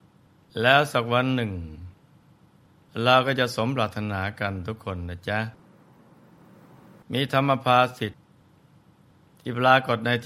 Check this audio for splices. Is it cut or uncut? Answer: uncut